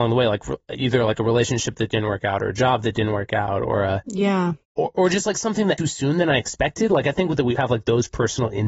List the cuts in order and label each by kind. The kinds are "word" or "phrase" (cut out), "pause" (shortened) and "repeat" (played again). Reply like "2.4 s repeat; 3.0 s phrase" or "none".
4.6 s pause; 5.8 s phrase; 7.6 s word